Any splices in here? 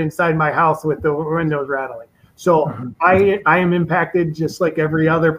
no; 0 cuts

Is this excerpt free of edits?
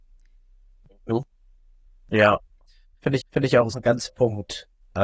no; 3 cuts; at 3.2 s, 3.7 s, 4.1 s

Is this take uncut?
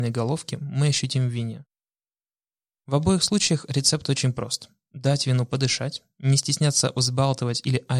yes; 0 cuts

